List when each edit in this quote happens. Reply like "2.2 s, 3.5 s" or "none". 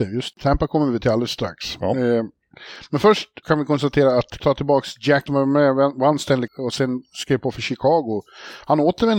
3.4 s, 4.4 s, 5.3 s, 6.5 s